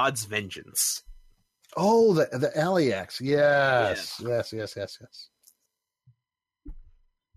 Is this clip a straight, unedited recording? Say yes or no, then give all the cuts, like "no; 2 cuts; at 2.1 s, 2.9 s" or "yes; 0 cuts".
yes; 0 cuts